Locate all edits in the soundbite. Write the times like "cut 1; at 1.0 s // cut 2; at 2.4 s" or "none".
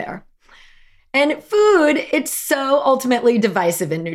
none